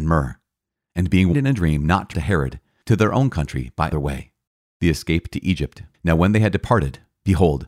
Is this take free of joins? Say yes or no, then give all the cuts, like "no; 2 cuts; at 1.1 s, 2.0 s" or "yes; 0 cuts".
no; 6 cuts; at 1.3 s, 2.1 s, 2.8 s, 3.9 s, 4.5 s, 5.9 s